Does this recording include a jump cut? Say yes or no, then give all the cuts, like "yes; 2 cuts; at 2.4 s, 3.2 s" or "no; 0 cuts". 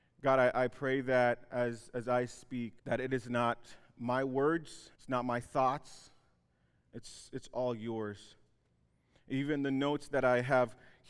yes; 2 cuts; at 2.8 s, 4.9 s